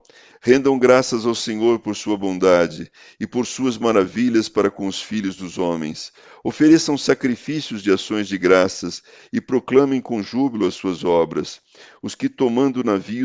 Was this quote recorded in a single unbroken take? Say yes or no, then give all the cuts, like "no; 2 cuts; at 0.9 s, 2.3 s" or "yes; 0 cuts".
yes; 0 cuts